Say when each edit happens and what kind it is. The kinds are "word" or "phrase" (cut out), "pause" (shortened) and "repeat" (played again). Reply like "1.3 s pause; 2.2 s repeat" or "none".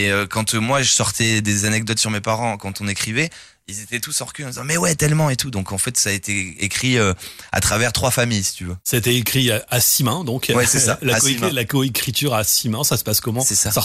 none